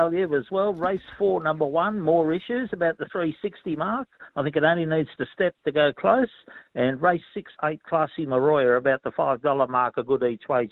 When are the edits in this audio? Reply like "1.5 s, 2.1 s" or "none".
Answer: 7.6 s

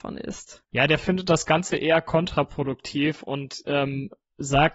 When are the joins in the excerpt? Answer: none

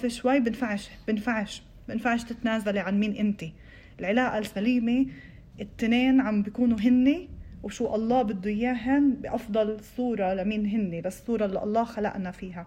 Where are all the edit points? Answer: none

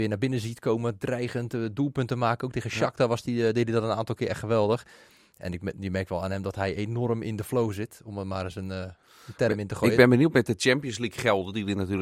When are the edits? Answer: none

